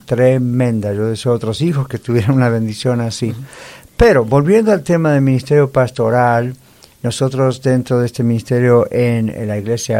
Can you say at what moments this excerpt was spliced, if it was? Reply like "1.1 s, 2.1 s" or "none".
none